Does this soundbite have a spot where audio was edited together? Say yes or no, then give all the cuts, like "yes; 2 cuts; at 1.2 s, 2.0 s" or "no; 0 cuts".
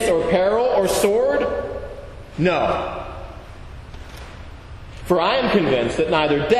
no; 0 cuts